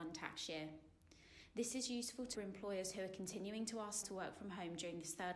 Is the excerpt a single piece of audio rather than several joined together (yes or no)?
no